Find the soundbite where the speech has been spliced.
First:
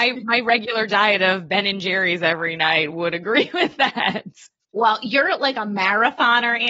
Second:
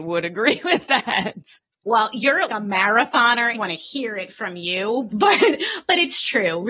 second; 3 cuts; at 2.5 s, 3.5 s, 5.1 s

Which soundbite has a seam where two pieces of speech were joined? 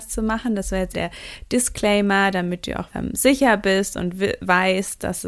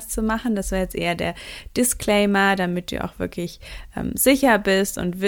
first; 2 cuts; at 0.9 s, 2.9 s

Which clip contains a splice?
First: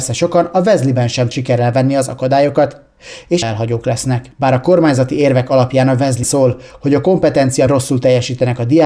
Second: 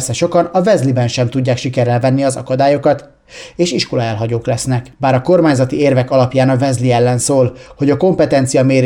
first; 4 cuts; at 1.3 s, 3.4 s, 6.2 s, 7.7 s

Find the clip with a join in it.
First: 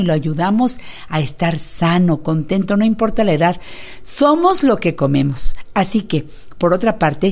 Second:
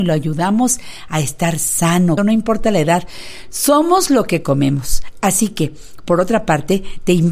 second; 1 cut; at 2.2 s

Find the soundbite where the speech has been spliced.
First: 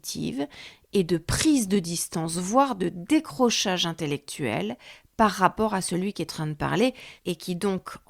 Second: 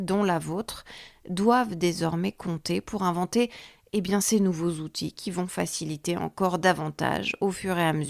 first; 2 cuts; at 6.3 s, 7.2 s

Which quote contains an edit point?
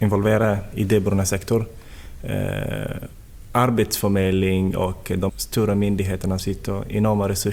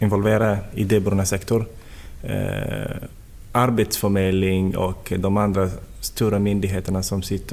first; 2 cuts; at 5.3 s, 6.4 s

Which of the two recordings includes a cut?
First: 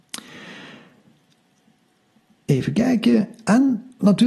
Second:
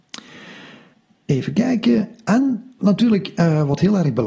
second; 1 cut; at 0.9 s

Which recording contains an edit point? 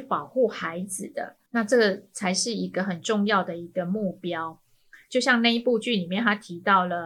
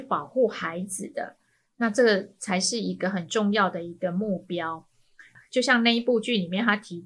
first; 2 cuts; at 1.5 s, 5.0 s

